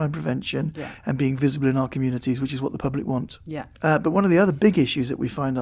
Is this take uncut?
yes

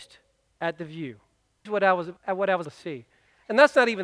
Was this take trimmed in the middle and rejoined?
yes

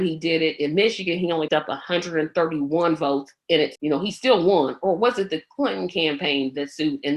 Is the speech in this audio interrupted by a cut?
yes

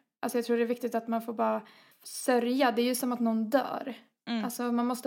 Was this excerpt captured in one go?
yes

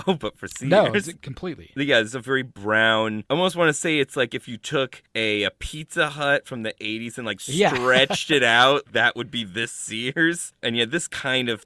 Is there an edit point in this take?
no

